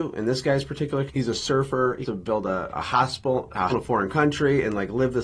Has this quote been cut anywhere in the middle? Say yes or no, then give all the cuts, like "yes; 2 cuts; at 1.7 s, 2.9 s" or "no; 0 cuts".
yes; 4 cuts; at 1.1 s, 2.0 s, 2.7 s, 3.7 s